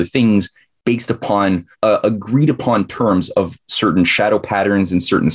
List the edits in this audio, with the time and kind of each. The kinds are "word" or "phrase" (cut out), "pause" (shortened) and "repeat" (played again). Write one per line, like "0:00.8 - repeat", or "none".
0:01.7 - pause